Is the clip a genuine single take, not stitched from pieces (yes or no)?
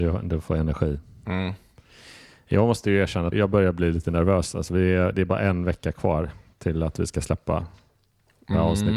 no